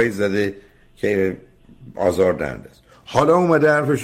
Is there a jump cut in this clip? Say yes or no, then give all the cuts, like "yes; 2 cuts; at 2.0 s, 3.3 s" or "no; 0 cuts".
no; 0 cuts